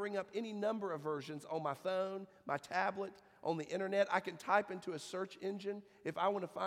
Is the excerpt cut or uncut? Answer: uncut